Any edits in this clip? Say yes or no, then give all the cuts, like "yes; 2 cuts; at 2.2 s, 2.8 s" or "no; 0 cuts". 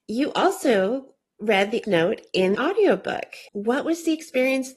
yes; 3 cuts; at 1.8 s, 2.5 s, 3.5 s